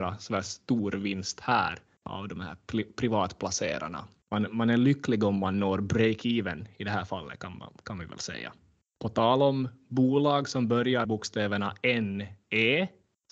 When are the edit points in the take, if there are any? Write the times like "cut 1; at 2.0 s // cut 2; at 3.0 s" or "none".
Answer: cut 1; at 11.0 s

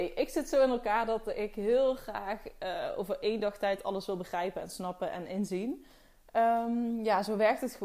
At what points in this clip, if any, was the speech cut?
none

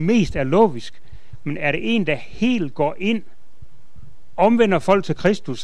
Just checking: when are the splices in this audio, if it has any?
none

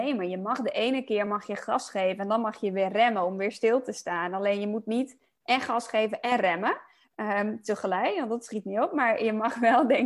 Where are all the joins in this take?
none

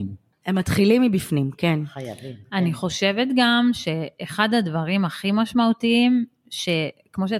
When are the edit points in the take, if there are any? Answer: none

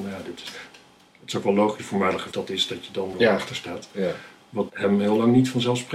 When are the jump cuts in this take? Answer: cut 1; at 1.8 s // cut 2; at 2.3 s // cut 3; at 3.1 s // cut 4; at 4.7 s

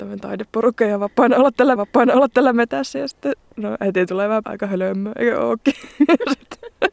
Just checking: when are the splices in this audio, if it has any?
cut 1; at 1.8 s // cut 2; at 4.4 s

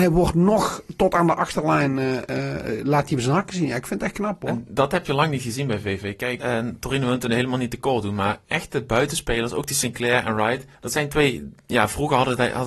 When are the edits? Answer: cut 1; at 6.4 s // cut 2; at 10.7 s

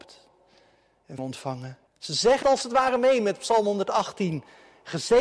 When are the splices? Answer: cut 1; at 1.2 s // cut 2; at 1.9 s // cut 3; at 2.4 s

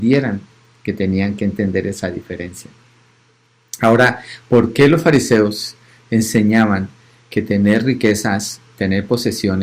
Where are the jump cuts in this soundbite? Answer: none

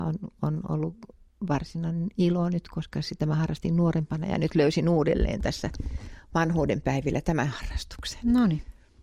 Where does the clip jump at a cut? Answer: none

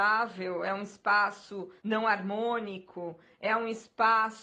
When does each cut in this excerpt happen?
cut 1; at 1.8 s

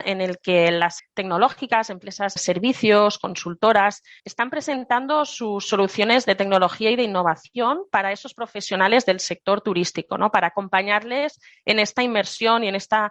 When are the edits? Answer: cut 1; at 1.0 s // cut 2; at 2.4 s // cut 3; at 4.2 s

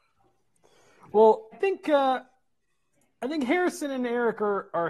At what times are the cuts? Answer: cut 1; at 1.5 s

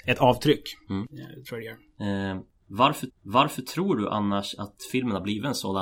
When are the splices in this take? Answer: cut 1; at 3.1 s

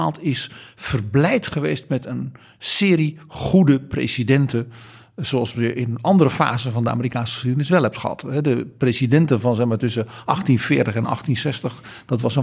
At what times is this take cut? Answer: none

